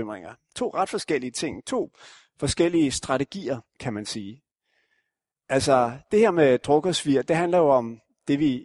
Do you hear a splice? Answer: no; 0 cuts

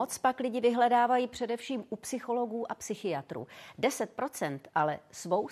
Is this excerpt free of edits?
yes; 0 cuts

